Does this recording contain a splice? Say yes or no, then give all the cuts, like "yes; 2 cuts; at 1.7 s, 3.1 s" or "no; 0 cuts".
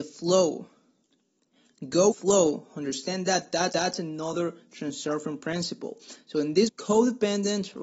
yes; 3 cuts; at 2.1 s, 3.7 s, 6.7 s